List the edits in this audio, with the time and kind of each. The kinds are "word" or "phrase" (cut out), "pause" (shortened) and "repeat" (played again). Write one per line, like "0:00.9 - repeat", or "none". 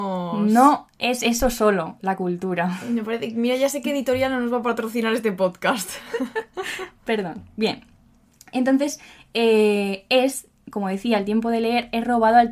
none